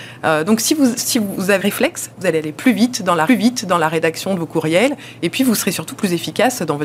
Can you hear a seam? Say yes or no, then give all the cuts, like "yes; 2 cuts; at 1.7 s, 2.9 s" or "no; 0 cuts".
yes; 3 cuts; at 1.6 s, 2.2 s, 3.3 s